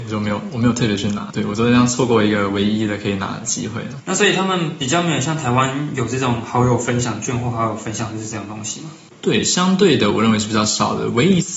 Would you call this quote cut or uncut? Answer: uncut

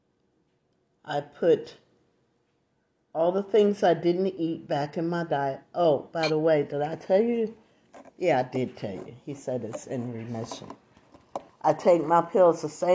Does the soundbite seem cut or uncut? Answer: uncut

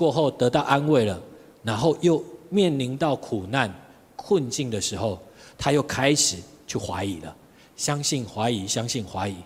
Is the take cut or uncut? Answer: uncut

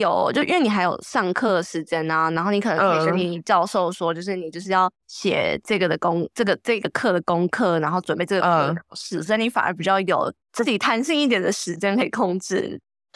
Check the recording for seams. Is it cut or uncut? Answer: cut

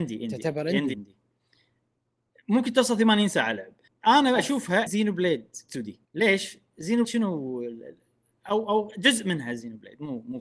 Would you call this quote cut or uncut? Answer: cut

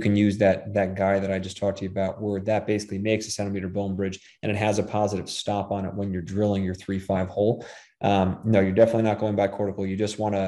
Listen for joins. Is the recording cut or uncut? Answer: uncut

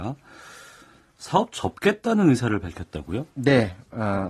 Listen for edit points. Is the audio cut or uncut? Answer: cut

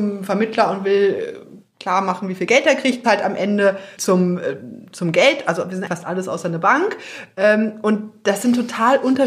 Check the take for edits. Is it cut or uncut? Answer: cut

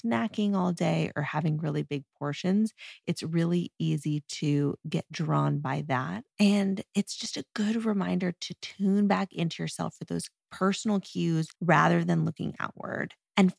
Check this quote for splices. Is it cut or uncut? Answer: cut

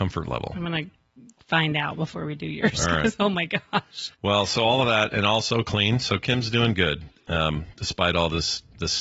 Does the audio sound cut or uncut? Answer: cut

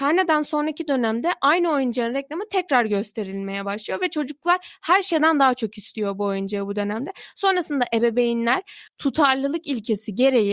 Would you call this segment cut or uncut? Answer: cut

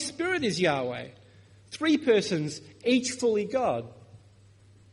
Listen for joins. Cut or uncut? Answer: uncut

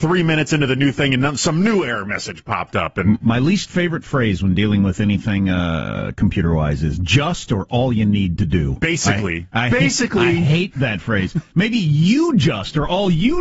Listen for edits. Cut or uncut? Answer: uncut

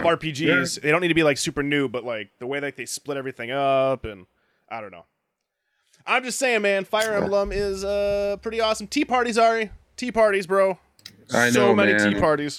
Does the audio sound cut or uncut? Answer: uncut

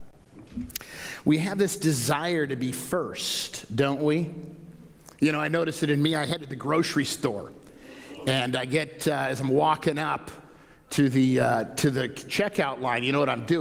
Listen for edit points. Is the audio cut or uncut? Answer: uncut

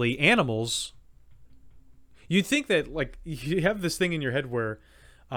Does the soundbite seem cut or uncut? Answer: uncut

